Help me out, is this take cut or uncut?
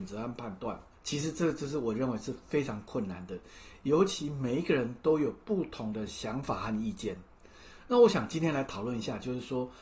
cut